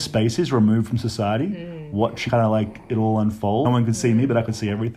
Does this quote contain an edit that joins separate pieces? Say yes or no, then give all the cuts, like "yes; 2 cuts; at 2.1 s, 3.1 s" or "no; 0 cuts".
yes; 2 cuts; at 2.3 s, 3.6 s